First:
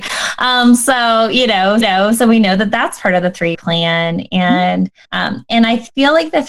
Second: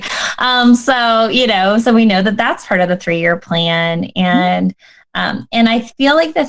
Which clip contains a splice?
first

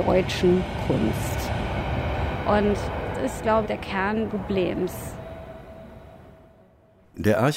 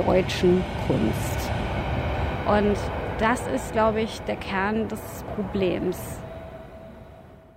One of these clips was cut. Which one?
first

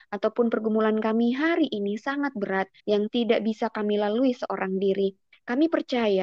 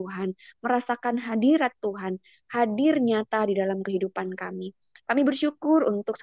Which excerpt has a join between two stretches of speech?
first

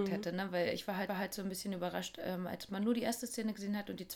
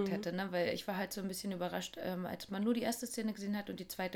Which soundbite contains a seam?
first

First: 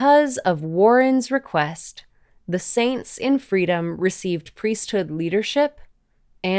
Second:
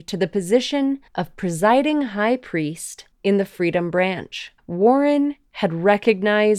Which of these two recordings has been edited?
second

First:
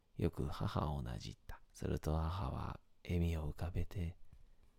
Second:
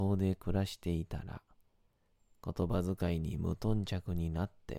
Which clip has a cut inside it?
first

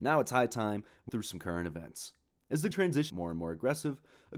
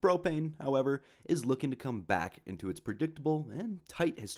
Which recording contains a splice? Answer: first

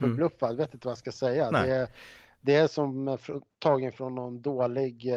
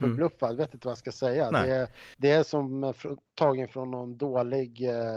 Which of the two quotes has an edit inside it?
second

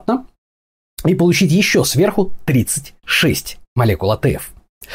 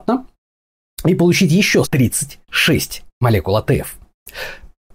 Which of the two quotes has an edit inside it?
second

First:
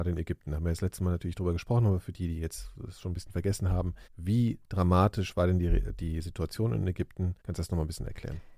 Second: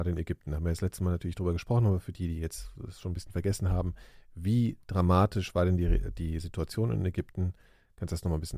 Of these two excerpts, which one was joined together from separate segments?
first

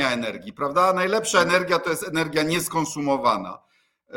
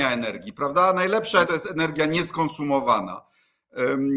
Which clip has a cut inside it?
second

